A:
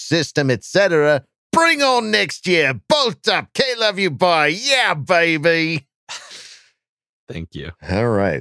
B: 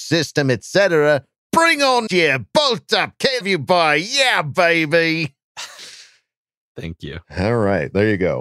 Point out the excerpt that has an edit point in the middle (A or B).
B